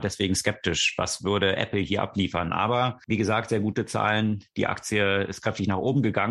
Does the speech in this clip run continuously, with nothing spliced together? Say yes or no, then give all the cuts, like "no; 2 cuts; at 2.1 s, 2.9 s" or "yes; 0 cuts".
yes; 0 cuts